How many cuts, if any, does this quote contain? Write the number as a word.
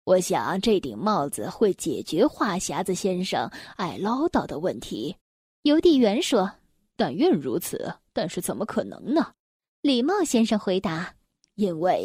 two